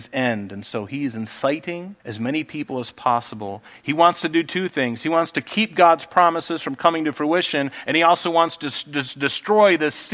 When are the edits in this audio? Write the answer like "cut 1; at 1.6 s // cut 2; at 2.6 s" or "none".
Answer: cut 1; at 2.0 s